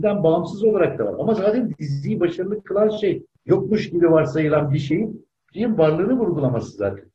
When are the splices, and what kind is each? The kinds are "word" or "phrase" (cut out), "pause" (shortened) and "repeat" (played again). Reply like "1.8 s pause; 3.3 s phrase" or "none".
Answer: 3.4 s word